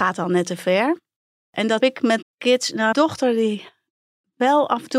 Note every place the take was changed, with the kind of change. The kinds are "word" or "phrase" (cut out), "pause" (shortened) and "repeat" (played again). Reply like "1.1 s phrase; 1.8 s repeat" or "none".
1.8 s word; 2.2 s word; 2.9 s phrase